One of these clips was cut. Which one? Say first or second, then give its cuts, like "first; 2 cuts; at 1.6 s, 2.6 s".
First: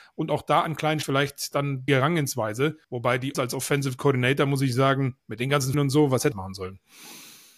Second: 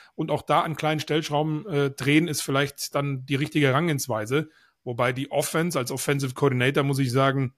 first; 7 cuts; at 1.0 s, 1.9 s, 2.8 s, 3.3 s, 5.2 s, 5.7 s, 6.3 s